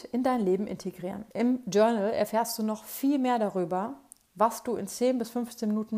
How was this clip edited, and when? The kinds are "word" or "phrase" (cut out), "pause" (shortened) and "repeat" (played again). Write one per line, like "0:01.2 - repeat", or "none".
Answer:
0:01.3 - pause